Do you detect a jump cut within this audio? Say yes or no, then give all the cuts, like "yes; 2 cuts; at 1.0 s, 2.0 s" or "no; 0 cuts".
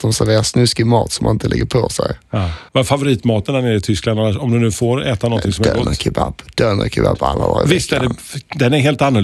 yes; 1 cut; at 2.7 s